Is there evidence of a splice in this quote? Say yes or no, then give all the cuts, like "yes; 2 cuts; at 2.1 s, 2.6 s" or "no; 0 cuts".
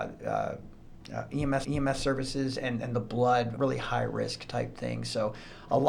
yes; 2 cuts; at 1.6 s, 3.6 s